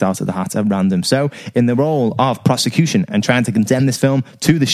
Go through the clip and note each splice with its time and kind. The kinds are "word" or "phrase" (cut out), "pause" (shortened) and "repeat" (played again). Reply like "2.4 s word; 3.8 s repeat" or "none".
none